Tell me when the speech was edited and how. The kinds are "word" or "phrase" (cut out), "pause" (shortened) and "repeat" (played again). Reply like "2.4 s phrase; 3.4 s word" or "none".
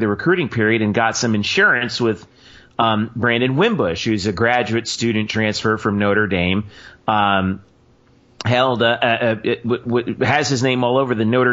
none